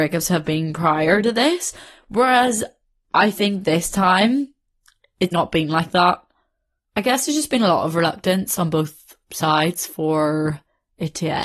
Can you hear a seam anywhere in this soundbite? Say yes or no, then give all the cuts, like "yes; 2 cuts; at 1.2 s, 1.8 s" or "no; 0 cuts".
yes; 1 cut; at 5.3 s